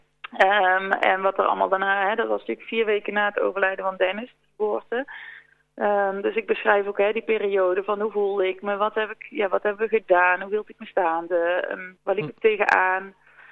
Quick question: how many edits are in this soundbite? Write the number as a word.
one